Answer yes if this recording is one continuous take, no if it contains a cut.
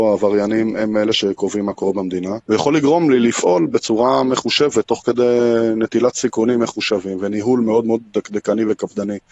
no